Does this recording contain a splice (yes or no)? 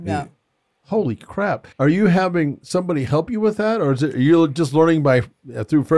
yes